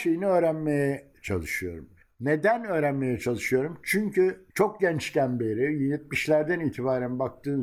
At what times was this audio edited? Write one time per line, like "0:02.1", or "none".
0:02.0
0:04.5